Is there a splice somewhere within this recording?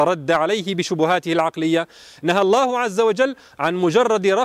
no; 0 cuts

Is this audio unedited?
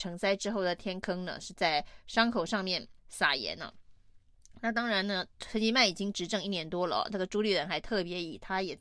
no; 1 cut; at 3.0 s

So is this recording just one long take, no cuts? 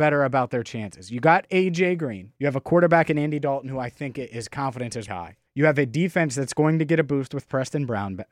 no; 3 cuts; at 2.4 s, 5.1 s, 5.5 s

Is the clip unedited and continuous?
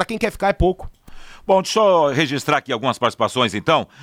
yes; 0 cuts

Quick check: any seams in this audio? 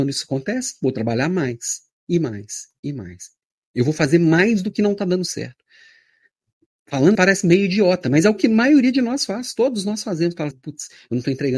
yes; 2 cuts; at 7.1 s, 10.5 s

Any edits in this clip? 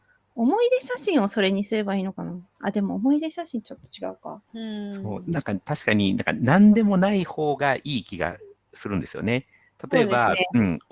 yes; 1 cut; at 4.5 s

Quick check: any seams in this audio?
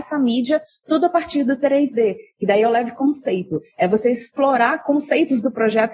no; 0 cuts

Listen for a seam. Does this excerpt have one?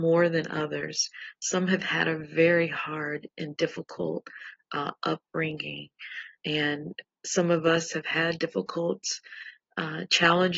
no; 0 cuts

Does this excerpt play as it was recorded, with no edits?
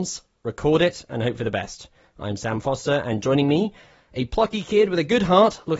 yes; 0 cuts

